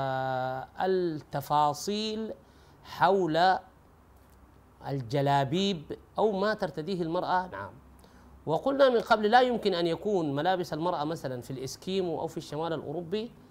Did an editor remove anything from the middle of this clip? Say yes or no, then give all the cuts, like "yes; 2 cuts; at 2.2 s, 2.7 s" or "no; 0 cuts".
yes; 2 cuts; at 6.1 s, 7.5 s